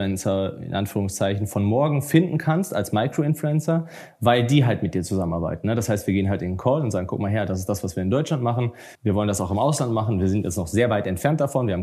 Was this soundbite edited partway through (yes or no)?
yes